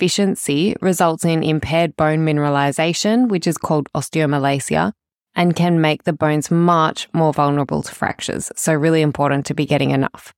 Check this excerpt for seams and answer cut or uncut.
uncut